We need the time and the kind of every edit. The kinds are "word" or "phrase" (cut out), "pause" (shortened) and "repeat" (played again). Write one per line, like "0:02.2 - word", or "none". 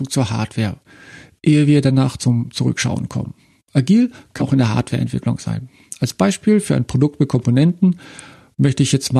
0:04.4 - word